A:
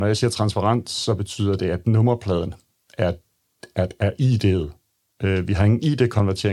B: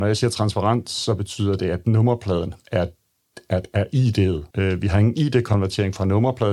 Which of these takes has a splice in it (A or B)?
B